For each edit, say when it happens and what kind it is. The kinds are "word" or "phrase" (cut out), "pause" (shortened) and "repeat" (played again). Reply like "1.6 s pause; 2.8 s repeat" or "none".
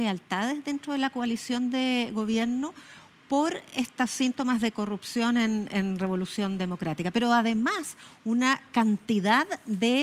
none